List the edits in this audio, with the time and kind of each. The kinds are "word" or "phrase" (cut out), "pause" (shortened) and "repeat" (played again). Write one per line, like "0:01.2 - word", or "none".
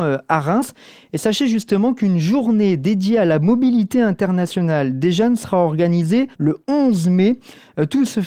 0:06.3 - pause